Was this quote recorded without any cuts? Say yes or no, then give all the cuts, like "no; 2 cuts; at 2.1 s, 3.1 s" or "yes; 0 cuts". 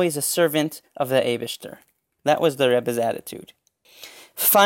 yes; 0 cuts